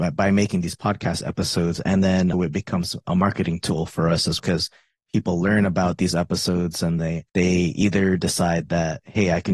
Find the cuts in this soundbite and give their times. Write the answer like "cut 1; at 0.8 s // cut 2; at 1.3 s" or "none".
cut 1; at 2.3 s // cut 2; at 3.0 s // cut 3; at 4.4 s // cut 4; at 7.0 s // cut 5; at 7.3 s